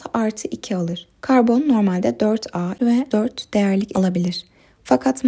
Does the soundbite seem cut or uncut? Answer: cut